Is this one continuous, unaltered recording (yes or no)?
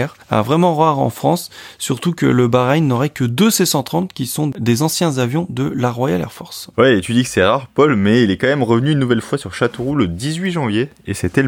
no